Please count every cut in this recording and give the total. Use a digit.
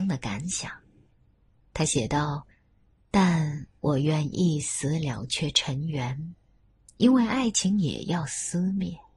2